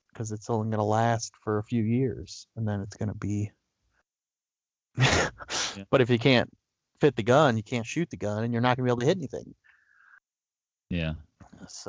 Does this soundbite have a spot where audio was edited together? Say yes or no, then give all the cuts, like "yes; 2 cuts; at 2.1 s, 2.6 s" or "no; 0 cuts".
no; 0 cuts